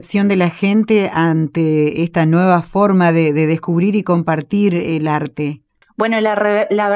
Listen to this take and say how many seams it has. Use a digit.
0